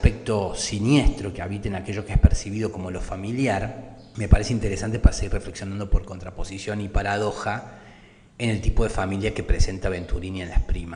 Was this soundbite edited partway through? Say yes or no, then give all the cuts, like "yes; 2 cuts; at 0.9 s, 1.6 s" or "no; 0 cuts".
no; 0 cuts